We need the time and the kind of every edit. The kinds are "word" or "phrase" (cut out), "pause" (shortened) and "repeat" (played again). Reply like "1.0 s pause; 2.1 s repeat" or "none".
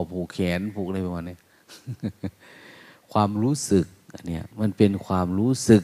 4.5 s pause